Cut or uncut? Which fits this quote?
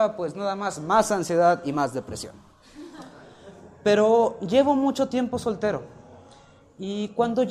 uncut